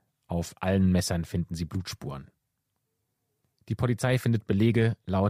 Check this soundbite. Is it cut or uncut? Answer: uncut